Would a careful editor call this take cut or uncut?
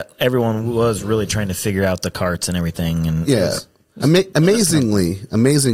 uncut